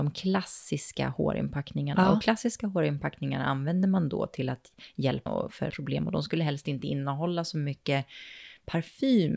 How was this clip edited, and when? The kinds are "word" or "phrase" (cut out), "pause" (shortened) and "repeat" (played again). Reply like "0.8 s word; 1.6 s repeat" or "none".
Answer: 5.3 s word; 5.7 s word

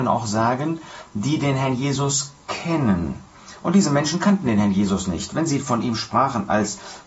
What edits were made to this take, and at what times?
none

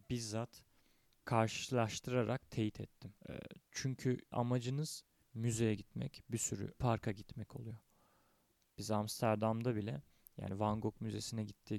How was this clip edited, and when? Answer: 1.1 s phrase; 3.2 s pause; 4.3 s word; 5.2 s phrase; 6.7 s phrase

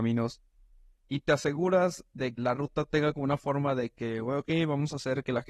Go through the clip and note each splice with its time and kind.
2.4 s word

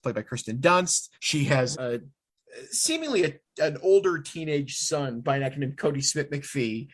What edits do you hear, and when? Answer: 1.1 s pause; 1.7 s word; 5.2 s word

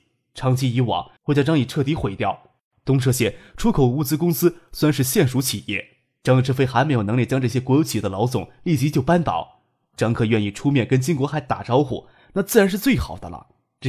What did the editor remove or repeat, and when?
1.2 s pause; 2.7 s pause

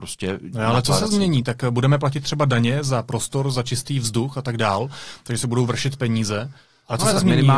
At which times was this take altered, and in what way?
none

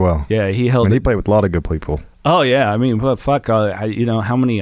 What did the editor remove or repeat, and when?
none

